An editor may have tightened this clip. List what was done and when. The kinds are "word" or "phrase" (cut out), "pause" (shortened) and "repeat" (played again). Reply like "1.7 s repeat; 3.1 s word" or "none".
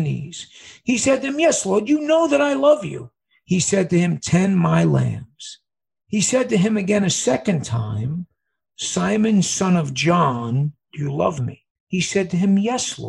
none